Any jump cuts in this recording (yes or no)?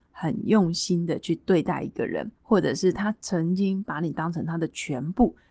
yes